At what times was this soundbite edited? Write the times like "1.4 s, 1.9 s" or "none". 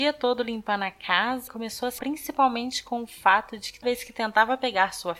1.5 s, 2.0 s, 3.8 s